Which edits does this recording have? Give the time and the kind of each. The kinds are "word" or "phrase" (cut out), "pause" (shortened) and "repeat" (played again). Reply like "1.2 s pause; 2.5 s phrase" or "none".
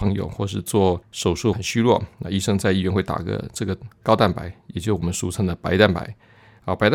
1.0 s pause; 1.5 s phrase

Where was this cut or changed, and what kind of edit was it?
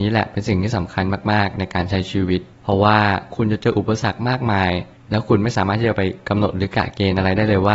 none

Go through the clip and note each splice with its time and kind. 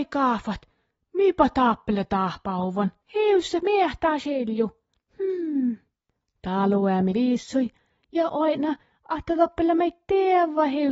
3.0 s pause; 3.6 s word; 7.1 s word

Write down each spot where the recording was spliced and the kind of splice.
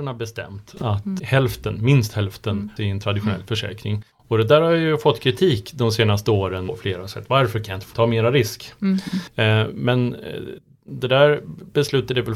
1.2 s word; 2.8 s phrase; 4.1 s pause; 6.7 s phrase; 7.9 s word

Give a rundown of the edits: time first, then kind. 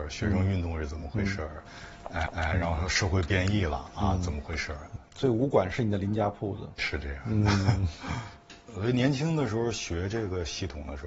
2.3 s repeat; 6.8 s word

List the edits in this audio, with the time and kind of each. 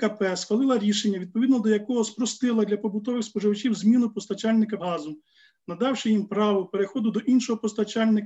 4.8 s word

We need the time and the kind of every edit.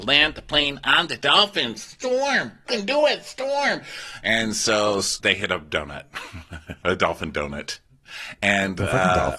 2.7 s word; 5.2 s word; 6.8 s word

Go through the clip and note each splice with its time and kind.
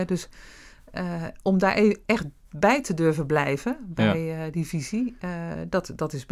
none

